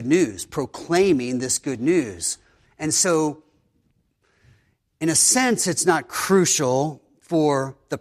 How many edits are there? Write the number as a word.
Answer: zero